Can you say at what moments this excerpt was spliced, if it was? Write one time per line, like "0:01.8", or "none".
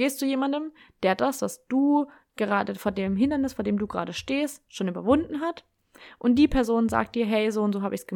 none